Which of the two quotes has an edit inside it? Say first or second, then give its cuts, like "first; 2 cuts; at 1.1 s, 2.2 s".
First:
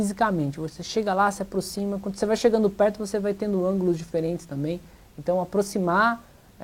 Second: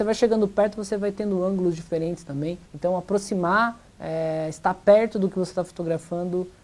second; 2 cuts; at 2.7 s, 3.9 s